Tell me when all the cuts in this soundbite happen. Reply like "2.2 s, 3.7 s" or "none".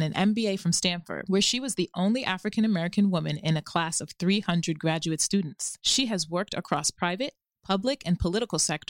none